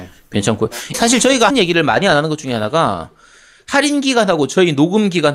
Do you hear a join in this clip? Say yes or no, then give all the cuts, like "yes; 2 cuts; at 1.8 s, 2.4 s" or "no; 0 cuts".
yes; 2 cuts; at 0.9 s, 1.5 s